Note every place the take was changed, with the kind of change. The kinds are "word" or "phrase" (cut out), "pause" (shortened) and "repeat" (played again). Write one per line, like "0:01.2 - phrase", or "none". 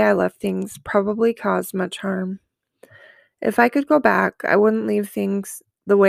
none